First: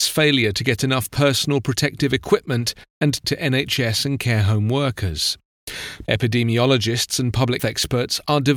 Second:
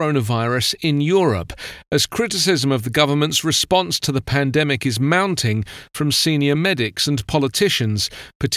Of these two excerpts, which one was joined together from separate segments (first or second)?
first